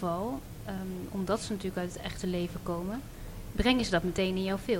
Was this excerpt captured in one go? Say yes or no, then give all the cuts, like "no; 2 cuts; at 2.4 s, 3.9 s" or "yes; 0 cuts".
yes; 0 cuts